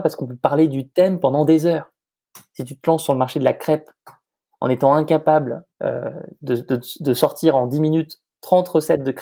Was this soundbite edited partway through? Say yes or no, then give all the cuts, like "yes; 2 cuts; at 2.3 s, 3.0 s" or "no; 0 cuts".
yes; 1 cut; at 5.7 s